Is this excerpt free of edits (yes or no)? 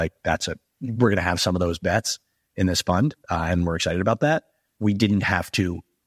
yes